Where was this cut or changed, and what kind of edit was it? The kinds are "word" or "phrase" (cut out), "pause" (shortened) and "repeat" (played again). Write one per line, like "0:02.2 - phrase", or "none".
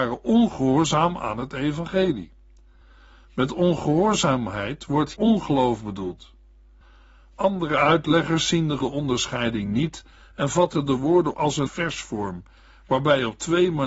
0:05.1 - word
0:08.8 - word
0:11.3 - word
0:11.7 - word